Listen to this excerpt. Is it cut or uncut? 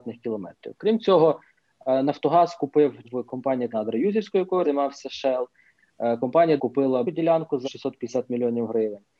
cut